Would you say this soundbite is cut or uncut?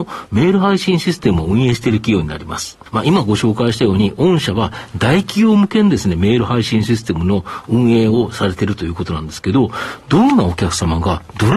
cut